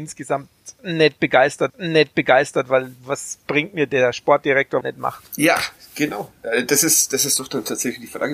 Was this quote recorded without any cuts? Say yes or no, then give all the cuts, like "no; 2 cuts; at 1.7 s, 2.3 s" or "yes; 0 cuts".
no; 2 cuts; at 1.7 s, 4.8 s